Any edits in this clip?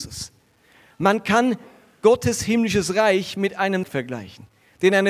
yes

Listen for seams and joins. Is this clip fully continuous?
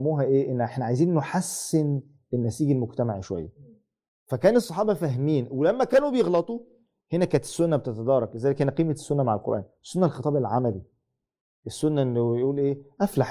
yes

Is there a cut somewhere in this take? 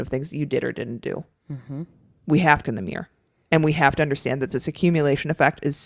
yes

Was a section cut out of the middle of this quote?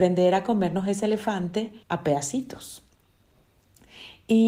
yes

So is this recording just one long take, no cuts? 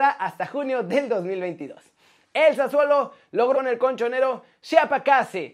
no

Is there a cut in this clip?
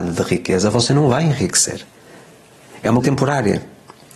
yes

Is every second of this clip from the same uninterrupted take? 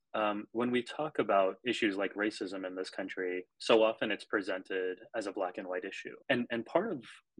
no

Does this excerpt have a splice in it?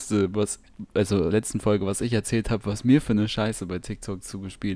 yes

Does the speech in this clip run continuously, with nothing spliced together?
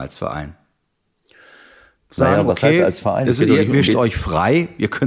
no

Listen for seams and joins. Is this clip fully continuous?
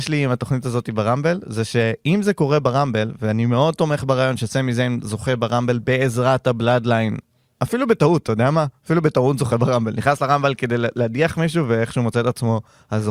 yes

